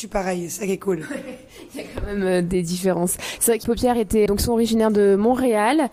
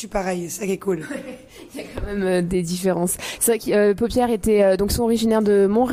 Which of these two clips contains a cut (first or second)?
first